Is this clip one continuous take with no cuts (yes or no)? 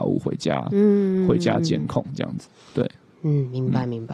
yes